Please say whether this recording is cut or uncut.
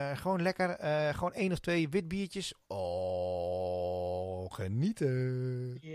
uncut